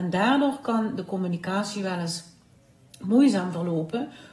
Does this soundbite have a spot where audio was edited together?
no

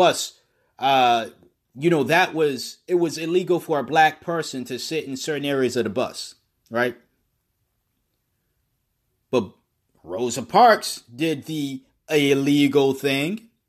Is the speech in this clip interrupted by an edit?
no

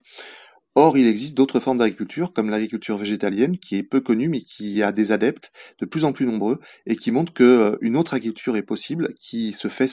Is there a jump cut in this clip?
no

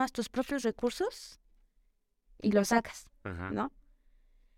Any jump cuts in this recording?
no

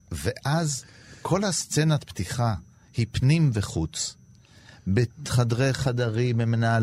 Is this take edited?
no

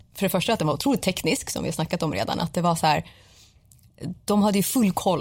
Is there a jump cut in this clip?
no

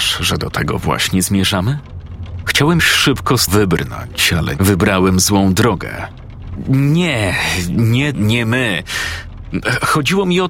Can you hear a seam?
yes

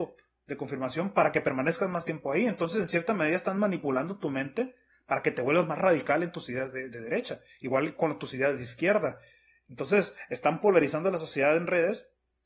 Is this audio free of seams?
yes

